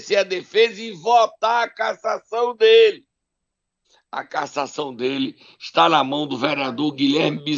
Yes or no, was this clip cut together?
yes